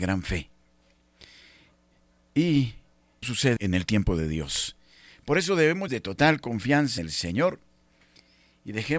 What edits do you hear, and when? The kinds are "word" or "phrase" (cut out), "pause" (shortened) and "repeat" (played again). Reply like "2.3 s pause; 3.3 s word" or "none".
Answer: 3.2 s word; 3.6 s word; 5.9 s word; 7.0 s word

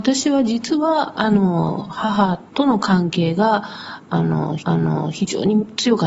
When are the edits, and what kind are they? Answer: 2.5 s pause; 4.6 s repeat

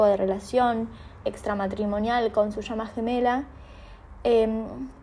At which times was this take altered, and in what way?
1.2 s word

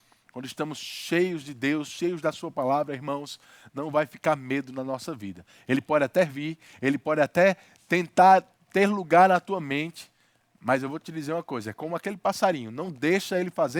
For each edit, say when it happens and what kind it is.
none

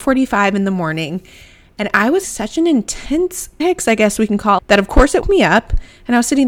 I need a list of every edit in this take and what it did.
2.2 s word; 3.6 s word; 4.6 s word; 5.2 s word

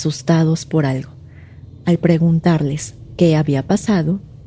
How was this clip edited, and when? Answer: none

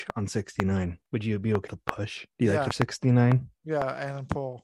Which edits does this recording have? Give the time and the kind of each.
1.1 s pause; 1.7 s word; 2.3 s pause; 2.7 s phrase

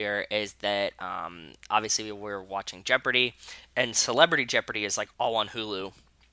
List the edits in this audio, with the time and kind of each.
5.1 s pause

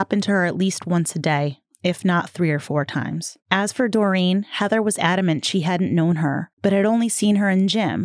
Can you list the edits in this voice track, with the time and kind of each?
3.4 s pause; 6.5 s pause

